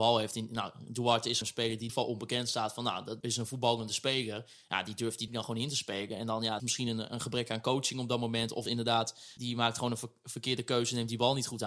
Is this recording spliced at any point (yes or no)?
yes